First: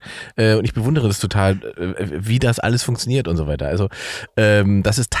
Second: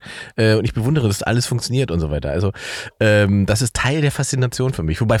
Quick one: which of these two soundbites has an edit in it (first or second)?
second